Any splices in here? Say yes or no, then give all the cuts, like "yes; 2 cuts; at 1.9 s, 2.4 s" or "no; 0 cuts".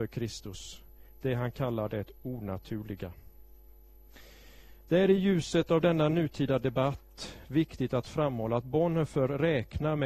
no; 0 cuts